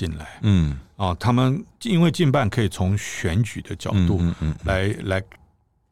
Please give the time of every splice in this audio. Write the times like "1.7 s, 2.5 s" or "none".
none